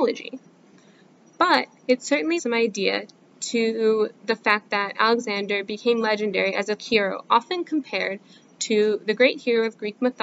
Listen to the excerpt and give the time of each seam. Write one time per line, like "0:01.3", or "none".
0:02.4
0:06.8